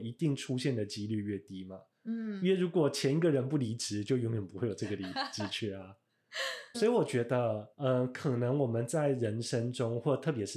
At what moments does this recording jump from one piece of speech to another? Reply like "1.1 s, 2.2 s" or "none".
6.7 s, 7.7 s